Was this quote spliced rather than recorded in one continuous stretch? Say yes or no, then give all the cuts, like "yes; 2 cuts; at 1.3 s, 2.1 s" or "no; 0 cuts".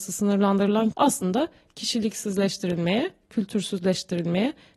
yes; 1 cut; at 0.9 s